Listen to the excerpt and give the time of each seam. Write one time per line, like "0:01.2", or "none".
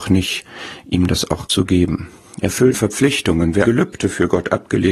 0:01.5
0:02.7
0:03.6